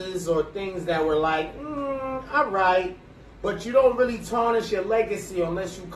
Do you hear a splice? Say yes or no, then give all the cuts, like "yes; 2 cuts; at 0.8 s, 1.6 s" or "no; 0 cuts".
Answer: no; 0 cuts